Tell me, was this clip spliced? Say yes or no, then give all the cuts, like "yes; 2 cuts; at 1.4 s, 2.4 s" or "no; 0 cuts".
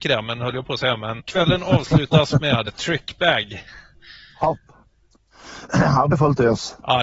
yes; 3 cuts; at 1.2 s, 2.7 s, 6.1 s